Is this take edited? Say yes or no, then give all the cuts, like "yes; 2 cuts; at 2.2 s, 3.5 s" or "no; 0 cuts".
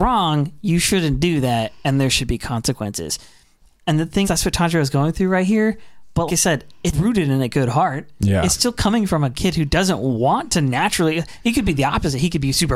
yes; 3 cuts; at 4.2 s, 6.3 s, 6.9 s